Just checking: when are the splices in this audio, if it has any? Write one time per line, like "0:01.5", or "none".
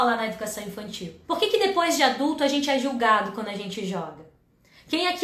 0:01.2